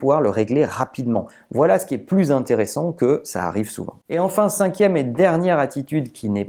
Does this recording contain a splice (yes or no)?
no